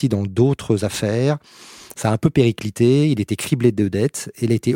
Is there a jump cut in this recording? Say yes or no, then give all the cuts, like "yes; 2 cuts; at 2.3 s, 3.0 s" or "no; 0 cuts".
no; 0 cuts